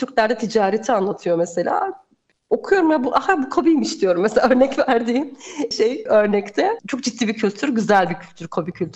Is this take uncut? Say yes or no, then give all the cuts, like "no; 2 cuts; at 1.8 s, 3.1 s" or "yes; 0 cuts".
yes; 0 cuts